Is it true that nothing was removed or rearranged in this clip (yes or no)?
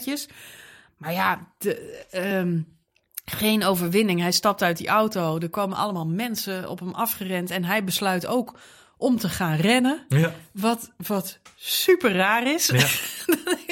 yes